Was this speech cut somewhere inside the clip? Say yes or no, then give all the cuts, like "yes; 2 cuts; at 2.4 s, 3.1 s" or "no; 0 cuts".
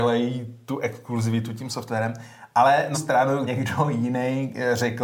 yes; 2 cuts; at 2.9 s, 3.5 s